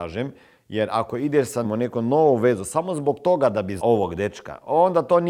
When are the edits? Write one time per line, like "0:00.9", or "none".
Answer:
0:01.6
0:03.8